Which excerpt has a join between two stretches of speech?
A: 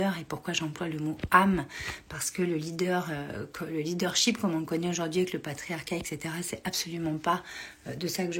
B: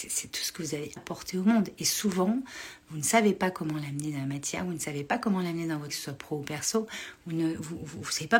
B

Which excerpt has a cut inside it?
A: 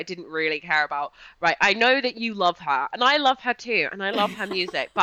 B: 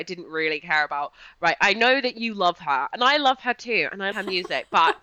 B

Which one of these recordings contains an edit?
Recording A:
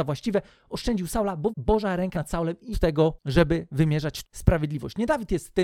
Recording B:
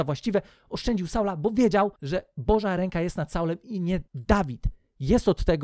A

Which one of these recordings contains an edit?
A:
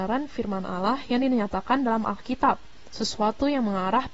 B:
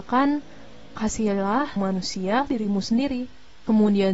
B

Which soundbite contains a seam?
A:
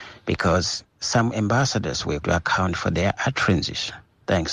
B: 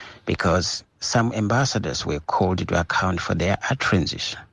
A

